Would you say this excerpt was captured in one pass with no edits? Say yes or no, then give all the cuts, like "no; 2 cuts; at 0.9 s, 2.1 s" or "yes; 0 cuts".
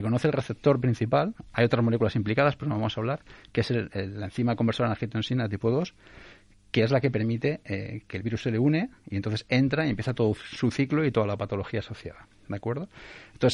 yes; 0 cuts